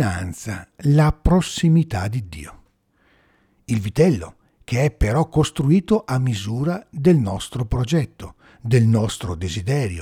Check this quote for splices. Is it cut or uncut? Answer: uncut